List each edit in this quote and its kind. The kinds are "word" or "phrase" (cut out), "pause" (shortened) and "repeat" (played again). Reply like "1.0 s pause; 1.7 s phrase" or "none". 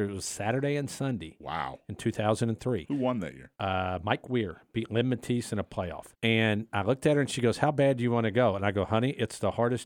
3.5 s pause; 6.1 s pause